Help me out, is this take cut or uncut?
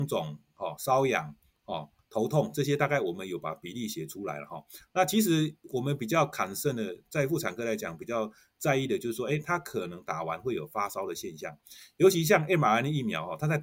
uncut